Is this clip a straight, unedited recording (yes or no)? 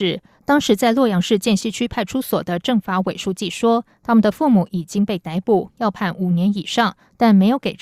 yes